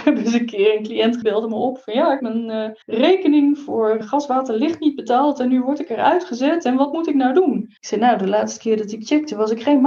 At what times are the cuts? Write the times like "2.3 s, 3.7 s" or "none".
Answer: 1.2 s, 2.2 s, 2.8 s, 4.0 s, 7.8 s